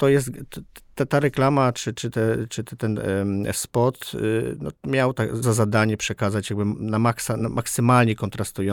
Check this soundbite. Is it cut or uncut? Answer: cut